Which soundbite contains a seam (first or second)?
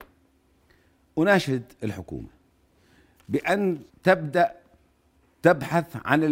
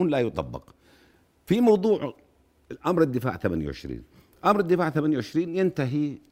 first